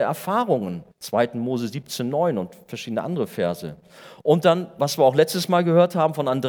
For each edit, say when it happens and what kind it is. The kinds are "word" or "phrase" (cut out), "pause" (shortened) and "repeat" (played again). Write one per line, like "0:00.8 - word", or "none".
0:00.9 - pause

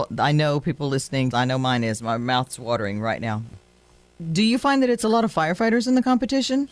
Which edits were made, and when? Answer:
0:01.3 - word

